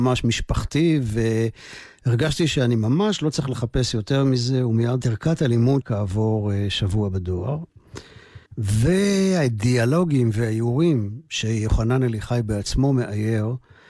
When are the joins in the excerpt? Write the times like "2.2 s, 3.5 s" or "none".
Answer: 5.0 s, 5.8 s, 8.5 s